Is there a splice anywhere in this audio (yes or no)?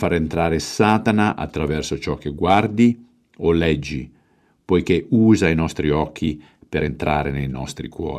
no